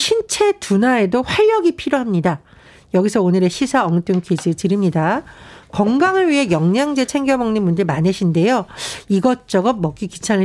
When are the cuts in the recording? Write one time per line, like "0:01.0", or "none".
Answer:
none